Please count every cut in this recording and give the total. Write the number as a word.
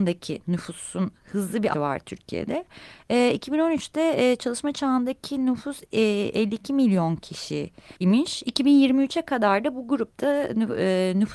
two